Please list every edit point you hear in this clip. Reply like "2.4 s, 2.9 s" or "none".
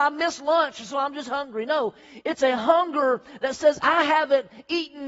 none